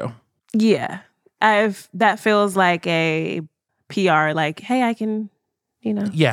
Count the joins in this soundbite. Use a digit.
0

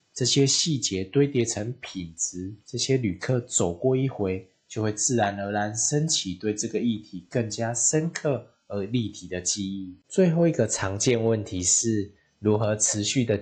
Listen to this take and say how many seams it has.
2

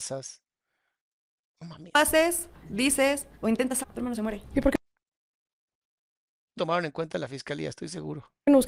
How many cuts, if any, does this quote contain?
3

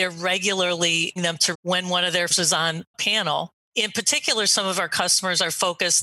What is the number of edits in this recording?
4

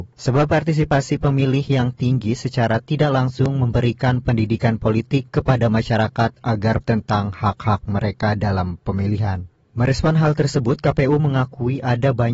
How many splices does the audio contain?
1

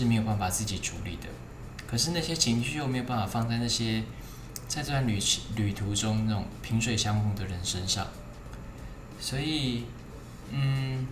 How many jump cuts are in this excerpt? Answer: 0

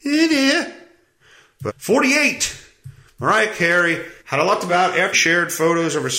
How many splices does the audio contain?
4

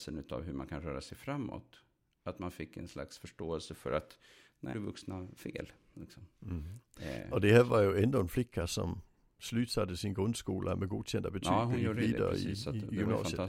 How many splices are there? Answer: 1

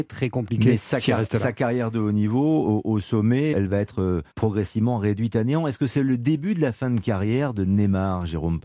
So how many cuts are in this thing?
2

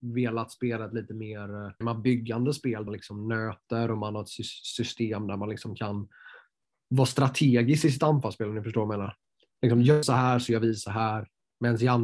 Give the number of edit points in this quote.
3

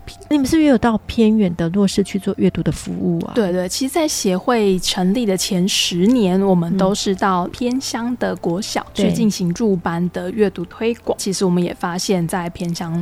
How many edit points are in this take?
0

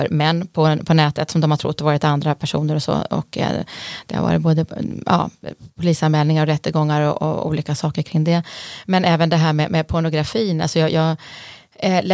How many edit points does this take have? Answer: 0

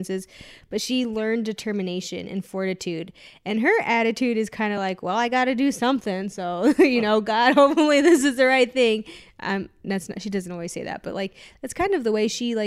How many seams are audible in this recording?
0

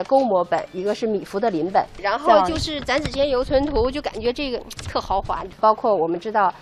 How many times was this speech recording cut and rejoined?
1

